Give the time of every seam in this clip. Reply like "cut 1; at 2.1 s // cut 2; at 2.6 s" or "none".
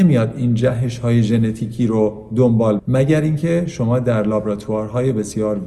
cut 1; at 2.8 s